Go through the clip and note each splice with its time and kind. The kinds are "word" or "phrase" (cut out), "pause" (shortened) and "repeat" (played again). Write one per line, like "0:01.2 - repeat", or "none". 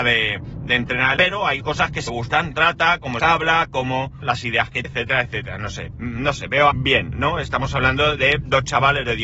0:01.2 - word
0:01.6 - word
0:02.1 - word
0:02.5 - word
0:03.2 - word
0:04.2 - word
0:04.8 - word
0:05.9 - word
0:06.7 - word